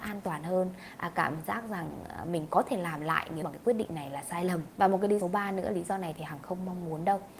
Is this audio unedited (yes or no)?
no